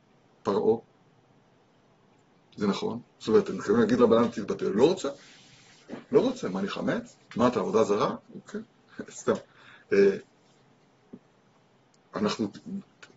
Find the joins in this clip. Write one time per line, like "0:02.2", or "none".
0:03.1
0:04.0
0:07.2
0:08.2